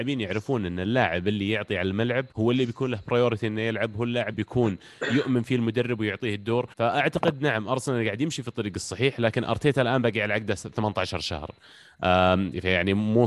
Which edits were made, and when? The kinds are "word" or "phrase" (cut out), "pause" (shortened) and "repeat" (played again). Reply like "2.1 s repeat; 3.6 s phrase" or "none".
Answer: 2.3 s pause; 4.3 s word; 6.7 s pause